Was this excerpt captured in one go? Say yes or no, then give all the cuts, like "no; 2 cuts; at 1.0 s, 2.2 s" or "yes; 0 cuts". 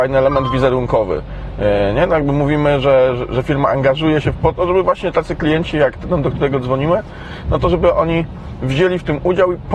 yes; 0 cuts